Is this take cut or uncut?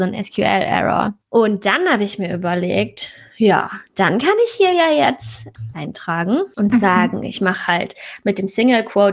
cut